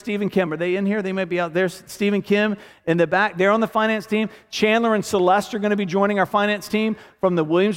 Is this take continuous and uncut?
yes; 0 cuts

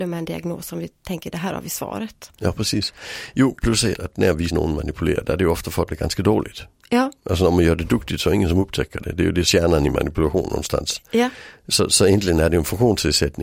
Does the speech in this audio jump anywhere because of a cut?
yes; 4 cuts; at 3.9 s, 4.5 s, 5.9 s, 9.4 s

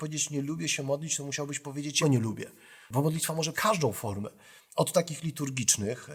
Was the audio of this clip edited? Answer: yes; 2 cuts; at 2.0 s, 3.5 s

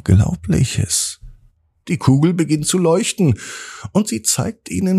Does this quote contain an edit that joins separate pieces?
no; 0 cuts

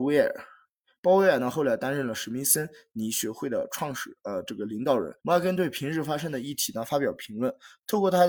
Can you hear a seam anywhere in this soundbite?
yes; 1 cut; at 5.2 s

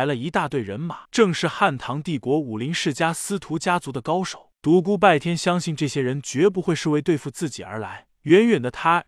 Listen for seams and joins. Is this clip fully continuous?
no; 1 cut; at 1.0 s

